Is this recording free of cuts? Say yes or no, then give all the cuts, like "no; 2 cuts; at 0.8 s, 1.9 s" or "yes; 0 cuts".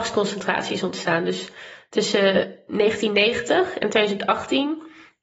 yes; 0 cuts